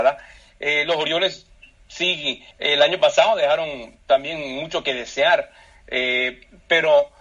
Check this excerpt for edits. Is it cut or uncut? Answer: cut